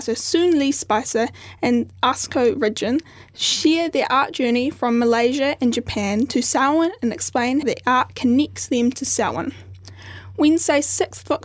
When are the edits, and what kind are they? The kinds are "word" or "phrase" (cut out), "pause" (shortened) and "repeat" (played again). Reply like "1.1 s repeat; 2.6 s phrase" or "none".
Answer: 7.6 s word